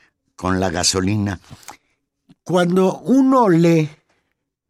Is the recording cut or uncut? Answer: uncut